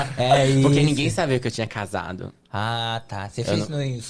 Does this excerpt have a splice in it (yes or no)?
no